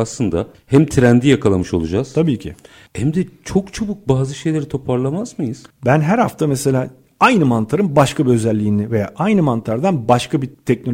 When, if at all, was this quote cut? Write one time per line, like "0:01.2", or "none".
none